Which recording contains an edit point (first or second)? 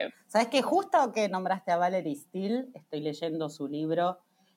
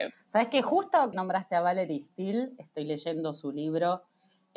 second